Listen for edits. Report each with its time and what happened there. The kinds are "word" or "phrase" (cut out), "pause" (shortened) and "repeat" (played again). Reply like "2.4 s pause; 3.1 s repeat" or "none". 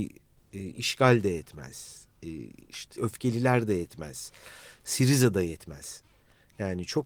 3.0 s word